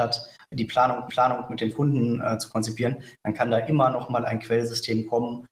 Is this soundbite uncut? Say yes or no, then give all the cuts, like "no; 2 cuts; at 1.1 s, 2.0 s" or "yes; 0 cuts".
no; 1 cut; at 1.1 s